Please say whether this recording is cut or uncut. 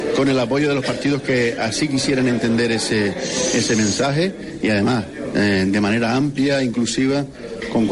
uncut